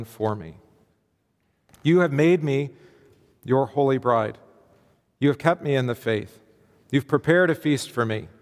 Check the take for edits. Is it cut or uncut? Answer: uncut